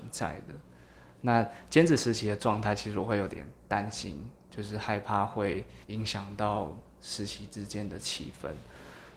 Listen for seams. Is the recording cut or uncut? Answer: cut